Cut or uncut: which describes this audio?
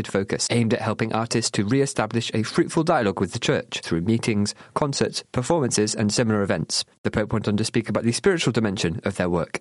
uncut